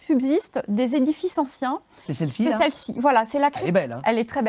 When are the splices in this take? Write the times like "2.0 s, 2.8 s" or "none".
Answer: none